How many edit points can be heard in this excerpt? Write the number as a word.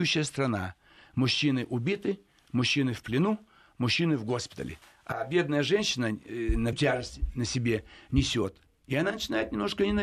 two